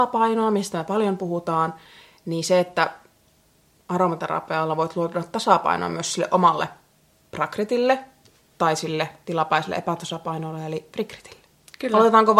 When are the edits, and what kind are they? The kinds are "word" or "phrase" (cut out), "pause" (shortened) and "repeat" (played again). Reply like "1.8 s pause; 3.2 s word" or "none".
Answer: none